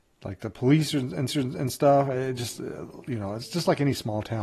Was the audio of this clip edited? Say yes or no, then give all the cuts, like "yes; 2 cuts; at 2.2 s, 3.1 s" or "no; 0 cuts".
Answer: yes; 1 cut; at 1.3 s